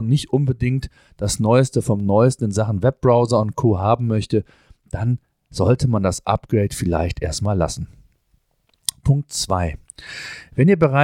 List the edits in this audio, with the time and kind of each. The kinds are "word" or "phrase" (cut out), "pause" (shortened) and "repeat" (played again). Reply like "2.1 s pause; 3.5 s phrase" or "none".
none